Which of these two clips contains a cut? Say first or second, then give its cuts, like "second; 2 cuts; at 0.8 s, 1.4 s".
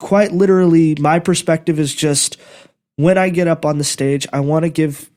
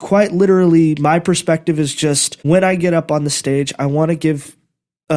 second; 1 cut; at 2.4 s